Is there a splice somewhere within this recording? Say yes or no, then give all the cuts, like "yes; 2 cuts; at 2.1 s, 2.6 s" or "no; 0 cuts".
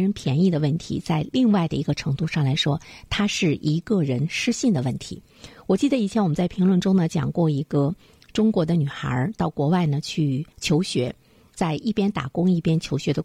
yes; 1 cut; at 10.5 s